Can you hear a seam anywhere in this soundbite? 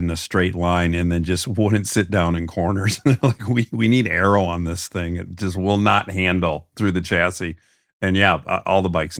no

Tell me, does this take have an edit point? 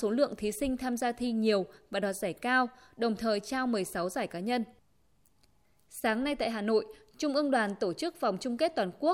no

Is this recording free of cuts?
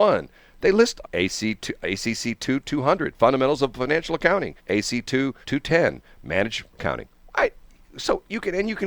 no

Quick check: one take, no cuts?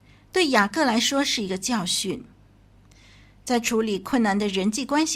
yes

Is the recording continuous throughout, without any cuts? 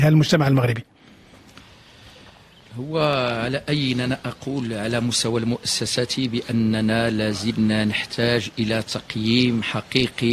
yes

